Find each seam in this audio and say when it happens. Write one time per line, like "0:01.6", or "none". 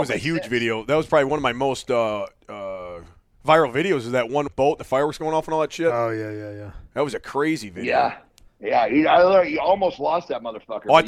0:04.5
0:08.5